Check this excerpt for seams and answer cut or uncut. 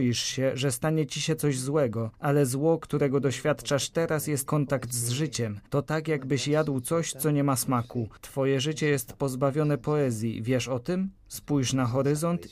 cut